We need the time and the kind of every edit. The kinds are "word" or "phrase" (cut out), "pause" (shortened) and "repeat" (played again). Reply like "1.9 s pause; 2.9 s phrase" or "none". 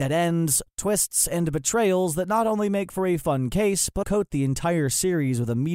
4.0 s word